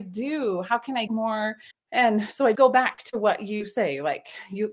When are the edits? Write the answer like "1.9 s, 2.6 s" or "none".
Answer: 1.1 s, 1.7 s, 2.5 s